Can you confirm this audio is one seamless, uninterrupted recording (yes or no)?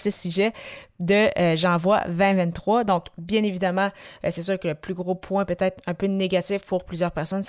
yes